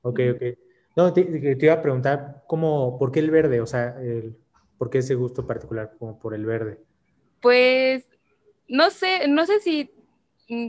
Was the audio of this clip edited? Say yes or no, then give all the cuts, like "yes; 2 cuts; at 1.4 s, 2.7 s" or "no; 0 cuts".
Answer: no; 0 cuts